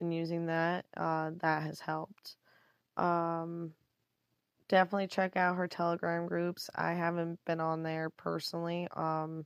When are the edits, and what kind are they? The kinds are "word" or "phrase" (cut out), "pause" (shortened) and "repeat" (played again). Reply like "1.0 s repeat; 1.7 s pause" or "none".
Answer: none